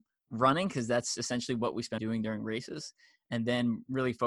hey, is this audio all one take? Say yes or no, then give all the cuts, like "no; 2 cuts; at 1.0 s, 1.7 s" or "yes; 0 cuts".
no; 1 cut; at 2.0 s